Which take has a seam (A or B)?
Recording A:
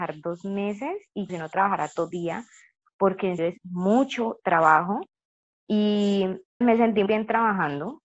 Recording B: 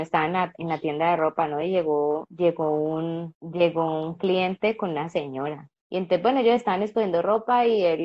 A